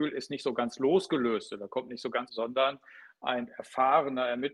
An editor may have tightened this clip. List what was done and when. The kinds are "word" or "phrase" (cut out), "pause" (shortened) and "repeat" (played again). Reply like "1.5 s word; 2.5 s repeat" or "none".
2.3 s phrase

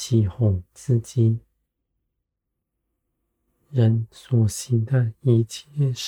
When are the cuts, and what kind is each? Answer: none

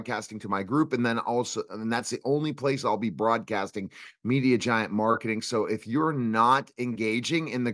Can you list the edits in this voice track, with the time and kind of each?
none

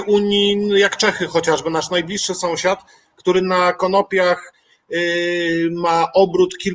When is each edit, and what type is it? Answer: none

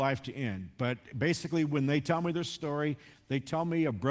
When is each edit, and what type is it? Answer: none

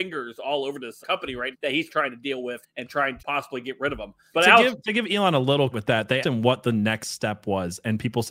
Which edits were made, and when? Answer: 1.0 s word; 1.5 s word; 1.9 s word; 2.6 s word; 3.2 s word; 4.3 s word; 5.7 s word; 6.2 s word

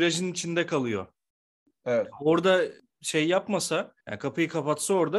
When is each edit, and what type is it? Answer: 4.0 s pause

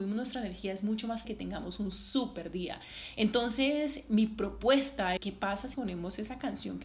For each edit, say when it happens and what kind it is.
1.2 s word; 5.2 s word; 5.7 s word

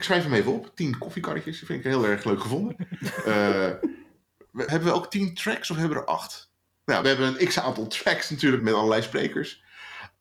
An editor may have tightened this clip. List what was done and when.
4.7 s word; 7.0 s word; 8.6 s word

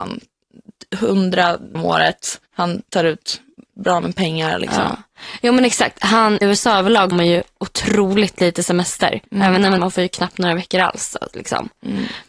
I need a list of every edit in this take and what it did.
1.7 s word; 2.5 s pause; 6.4 s word; 7.1 s phrase; 9.2 s pause; 9.8 s phrase

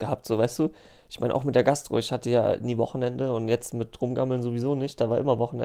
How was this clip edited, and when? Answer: none

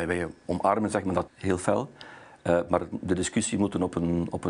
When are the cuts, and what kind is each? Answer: 1.3 s word

